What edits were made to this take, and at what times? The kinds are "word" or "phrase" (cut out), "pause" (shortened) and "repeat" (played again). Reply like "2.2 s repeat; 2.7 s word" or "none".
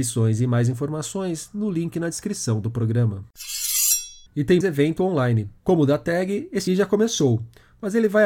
4.3 s pause; 4.6 s word; 5.6 s pause; 6.7 s word